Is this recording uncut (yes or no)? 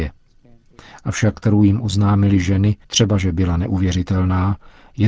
no